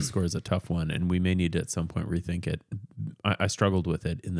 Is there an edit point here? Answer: no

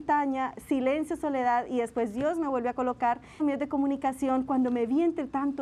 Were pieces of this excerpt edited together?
yes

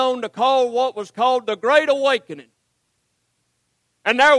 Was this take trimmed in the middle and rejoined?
no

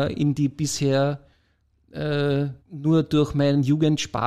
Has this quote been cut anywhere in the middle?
yes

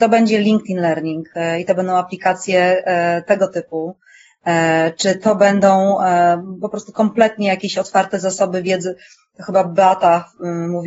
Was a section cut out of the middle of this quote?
no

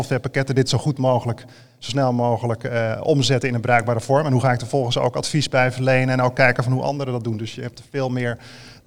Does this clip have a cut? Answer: no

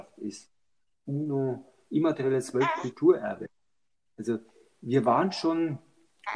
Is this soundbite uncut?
yes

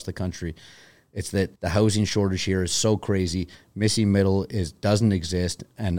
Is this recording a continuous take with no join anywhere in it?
no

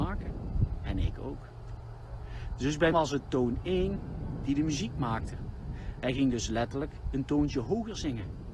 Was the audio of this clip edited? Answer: yes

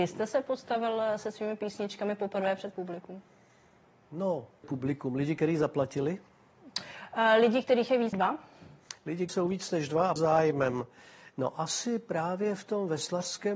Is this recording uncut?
no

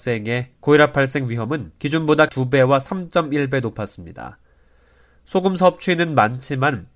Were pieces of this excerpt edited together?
yes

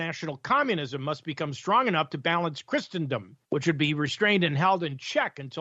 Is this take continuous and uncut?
no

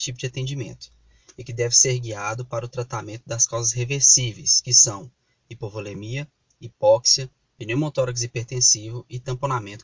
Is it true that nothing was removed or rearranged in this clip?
yes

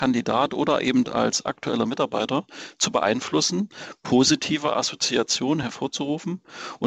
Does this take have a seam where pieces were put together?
no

